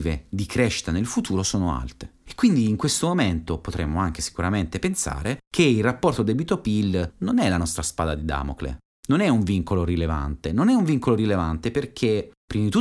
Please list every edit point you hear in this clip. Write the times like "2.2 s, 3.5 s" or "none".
none